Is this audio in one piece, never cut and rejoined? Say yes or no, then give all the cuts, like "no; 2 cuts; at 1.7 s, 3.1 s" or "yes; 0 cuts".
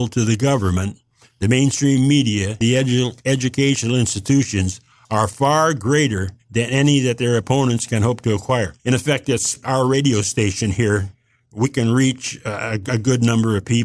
no; 4 cuts; at 2.6 s, 6.4 s, 8.8 s, 9.6 s